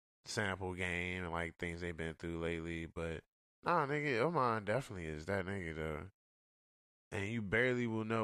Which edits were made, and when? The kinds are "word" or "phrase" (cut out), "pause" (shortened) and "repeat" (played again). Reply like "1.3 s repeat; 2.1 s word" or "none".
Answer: none